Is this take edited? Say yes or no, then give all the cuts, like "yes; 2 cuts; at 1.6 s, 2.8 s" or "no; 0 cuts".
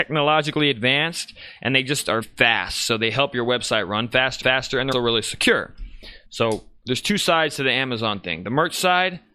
yes; 4 cuts; at 2.2 s, 4.4 s, 4.9 s, 6.2 s